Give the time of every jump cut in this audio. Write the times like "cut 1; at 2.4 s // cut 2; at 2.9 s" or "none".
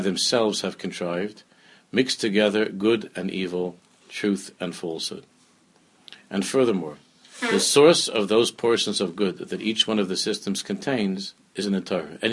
none